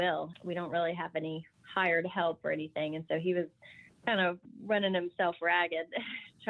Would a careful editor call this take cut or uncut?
uncut